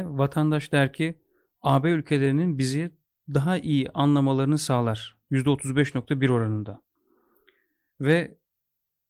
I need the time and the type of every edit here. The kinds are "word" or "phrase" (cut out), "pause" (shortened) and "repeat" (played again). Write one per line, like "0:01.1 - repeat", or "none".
none